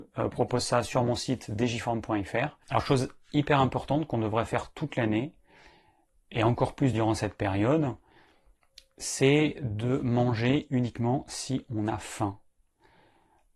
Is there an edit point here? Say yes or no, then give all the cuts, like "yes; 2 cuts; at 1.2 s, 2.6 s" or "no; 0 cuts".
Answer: no; 0 cuts